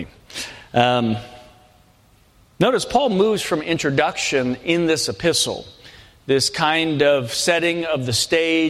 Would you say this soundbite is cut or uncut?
uncut